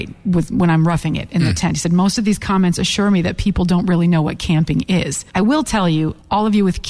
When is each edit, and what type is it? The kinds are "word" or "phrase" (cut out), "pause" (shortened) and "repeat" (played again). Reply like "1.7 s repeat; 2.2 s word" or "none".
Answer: none